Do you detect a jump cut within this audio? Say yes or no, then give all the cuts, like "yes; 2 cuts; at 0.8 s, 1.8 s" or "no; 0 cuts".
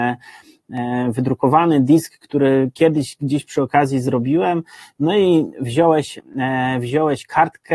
no; 0 cuts